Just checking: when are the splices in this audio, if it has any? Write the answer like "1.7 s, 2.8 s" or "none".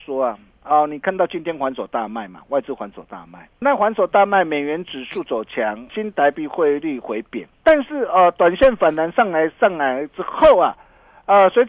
3.6 s, 5.9 s, 7.6 s